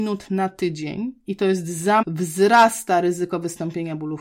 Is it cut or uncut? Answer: cut